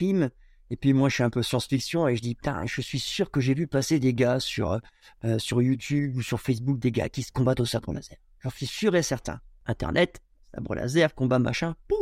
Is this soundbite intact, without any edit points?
yes; 0 cuts

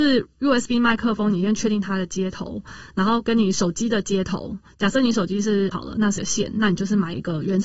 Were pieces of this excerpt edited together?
yes; 2 cuts; at 5.7 s, 6.2 s

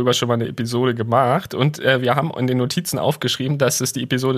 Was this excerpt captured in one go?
yes; 0 cuts

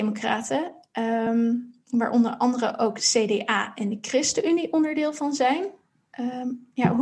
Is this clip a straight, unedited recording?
yes; 0 cuts

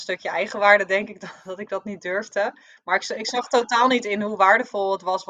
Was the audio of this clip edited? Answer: no; 0 cuts

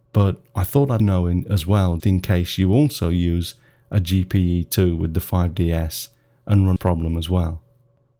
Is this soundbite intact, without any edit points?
no; 3 cuts; at 1.0 s, 2.0 s, 6.8 s

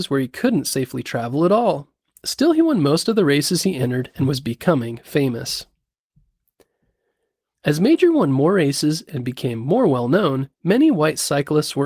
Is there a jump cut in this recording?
yes; 1 cut; at 10.5 s

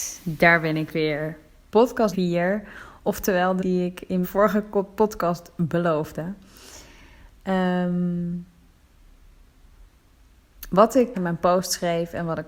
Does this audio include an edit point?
yes; 4 cuts; at 2.1 s, 3.6 s, 4.2 s, 11.1 s

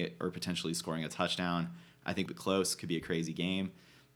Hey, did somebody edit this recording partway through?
yes; 1 cut; at 2.3 s

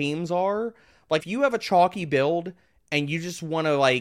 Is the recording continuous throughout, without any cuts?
no; 1 cut; at 1.2 s

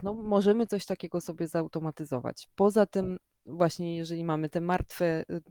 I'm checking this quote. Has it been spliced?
no; 0 cuts

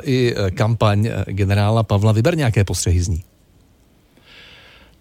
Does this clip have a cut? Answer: no; 0 cuts

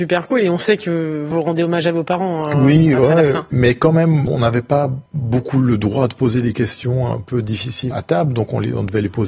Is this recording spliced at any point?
yes; 1 cut; at 7.9 s

